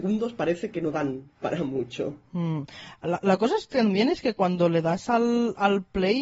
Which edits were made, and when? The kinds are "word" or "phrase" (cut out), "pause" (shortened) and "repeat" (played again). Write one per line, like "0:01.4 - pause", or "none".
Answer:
none